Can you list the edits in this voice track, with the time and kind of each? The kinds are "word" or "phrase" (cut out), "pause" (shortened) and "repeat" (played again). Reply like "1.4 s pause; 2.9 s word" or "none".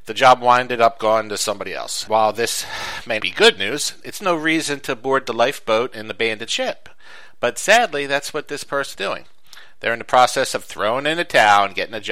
2.1 s word; 3.2 s word; 8.9 s word